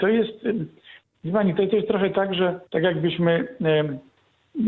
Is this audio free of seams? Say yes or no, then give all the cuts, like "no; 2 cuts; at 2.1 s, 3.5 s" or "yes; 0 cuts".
no; 1 cut; at 2.7 s